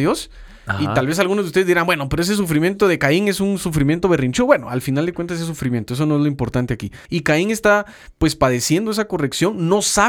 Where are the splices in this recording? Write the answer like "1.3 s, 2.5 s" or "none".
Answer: 7.1 s